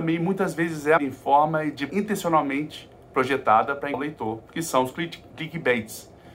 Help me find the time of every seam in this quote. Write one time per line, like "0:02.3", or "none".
0:01.0
0:01.9
0:03.9
0:04.4